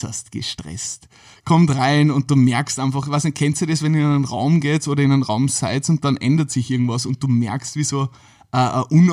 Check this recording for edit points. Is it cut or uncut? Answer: uncut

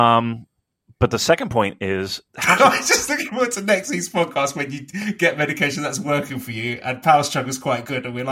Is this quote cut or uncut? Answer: cut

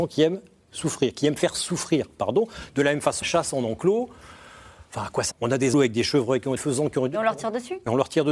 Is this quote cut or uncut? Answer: cut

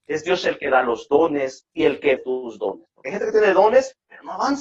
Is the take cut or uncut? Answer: cut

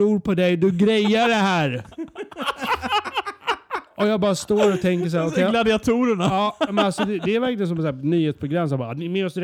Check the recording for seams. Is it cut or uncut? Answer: uncut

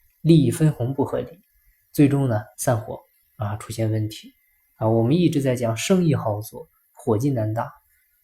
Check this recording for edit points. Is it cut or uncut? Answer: cut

